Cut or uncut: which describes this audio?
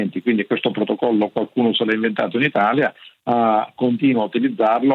uncut